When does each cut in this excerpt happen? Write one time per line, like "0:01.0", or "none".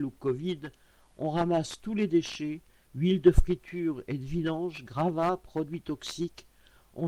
none